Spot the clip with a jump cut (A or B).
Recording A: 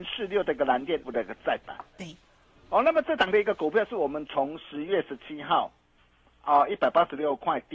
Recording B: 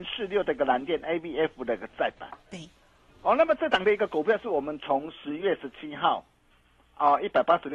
A